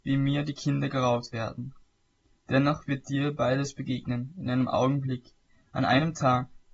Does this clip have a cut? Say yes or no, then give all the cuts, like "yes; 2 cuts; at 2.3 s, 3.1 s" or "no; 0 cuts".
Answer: no; 0 cuts